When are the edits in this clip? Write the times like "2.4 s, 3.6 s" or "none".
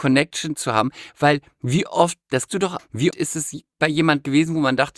2.5 s, 2.8 s, 3.1 s